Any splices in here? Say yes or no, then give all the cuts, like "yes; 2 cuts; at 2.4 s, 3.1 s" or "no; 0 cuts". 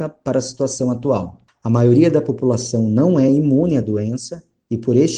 no; 0 cuts